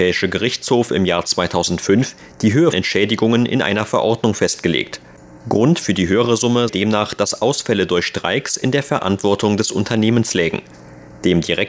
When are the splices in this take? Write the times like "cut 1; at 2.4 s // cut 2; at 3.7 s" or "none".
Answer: cut 1; at 2.7 s // cut 2; at 6.7 s